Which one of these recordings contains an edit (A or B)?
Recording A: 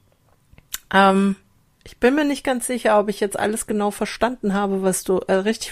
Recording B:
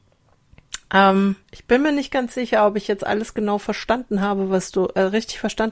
B